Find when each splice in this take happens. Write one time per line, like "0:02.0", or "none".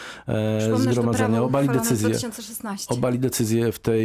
none